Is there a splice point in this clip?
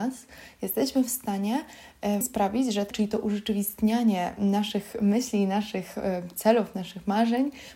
yes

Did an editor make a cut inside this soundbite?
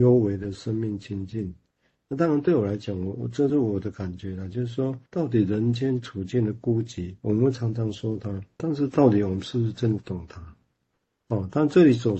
yes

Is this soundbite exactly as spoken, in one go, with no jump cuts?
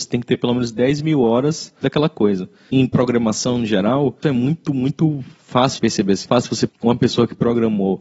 no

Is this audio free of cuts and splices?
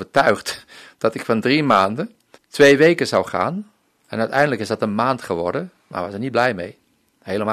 no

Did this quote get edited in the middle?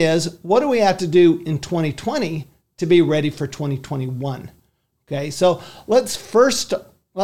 no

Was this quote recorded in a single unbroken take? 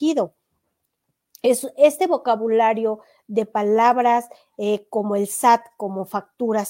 yes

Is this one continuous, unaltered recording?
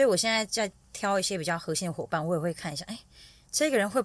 yes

